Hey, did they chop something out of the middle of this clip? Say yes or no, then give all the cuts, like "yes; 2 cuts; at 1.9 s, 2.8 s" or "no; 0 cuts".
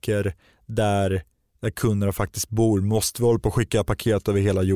no; 0 cuts